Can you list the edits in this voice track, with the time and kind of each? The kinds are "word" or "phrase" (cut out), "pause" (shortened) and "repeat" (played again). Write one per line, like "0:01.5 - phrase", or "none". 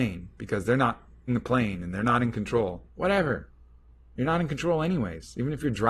0:01.3 - word
0:02.9 - pause